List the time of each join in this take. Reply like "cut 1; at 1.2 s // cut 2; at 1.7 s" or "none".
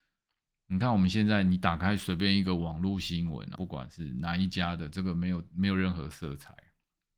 cut 1; at 3.5 s